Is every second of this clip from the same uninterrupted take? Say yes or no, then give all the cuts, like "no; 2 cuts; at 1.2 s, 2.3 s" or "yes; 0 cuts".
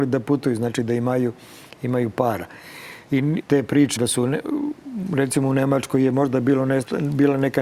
no; 2 cuts; at 3.4 s, 4.0 s